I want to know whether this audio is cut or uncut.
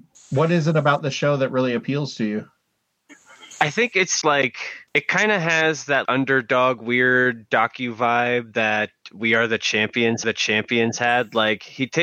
cut